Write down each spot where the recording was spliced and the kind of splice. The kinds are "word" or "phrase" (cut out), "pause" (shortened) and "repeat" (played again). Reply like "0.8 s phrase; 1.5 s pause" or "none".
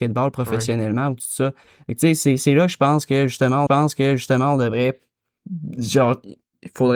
3.7 s repeat